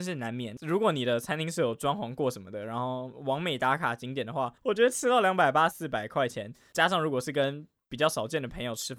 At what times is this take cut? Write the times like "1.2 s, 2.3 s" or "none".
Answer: 4.6 s, 5.7 s